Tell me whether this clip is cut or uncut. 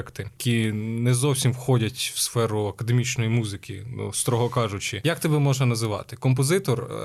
uncut